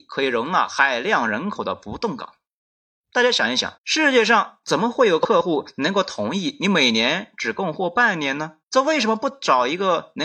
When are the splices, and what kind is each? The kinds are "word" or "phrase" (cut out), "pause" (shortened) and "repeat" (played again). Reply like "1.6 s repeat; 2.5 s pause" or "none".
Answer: 3.8 s pause; 8.6 s pause